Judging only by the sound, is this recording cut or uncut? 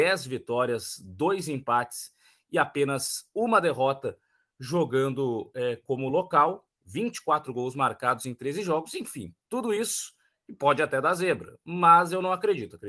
uncut